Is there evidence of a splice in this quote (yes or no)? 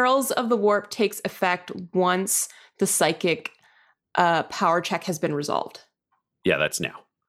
no